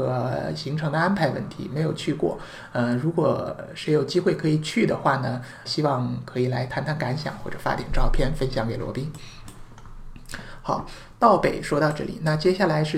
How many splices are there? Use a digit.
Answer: 1